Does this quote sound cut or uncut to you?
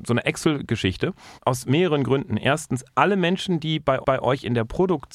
cut